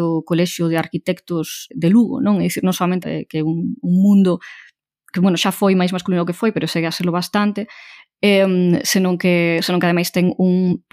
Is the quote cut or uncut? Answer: cut